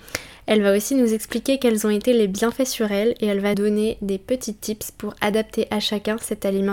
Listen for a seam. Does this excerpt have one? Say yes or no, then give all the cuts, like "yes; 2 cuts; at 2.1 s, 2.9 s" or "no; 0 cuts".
yes; 1 cut; at 3.5 s